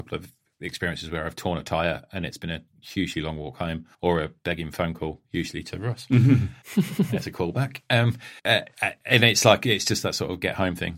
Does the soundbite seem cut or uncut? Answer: cut